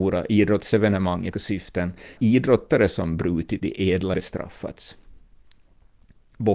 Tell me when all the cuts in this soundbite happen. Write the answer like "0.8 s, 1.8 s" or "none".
1.3 s, 2.2 s, 3.6 s, 4.1 s